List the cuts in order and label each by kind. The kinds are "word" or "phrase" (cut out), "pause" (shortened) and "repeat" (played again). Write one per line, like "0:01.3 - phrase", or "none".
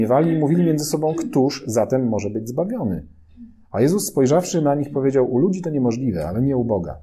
none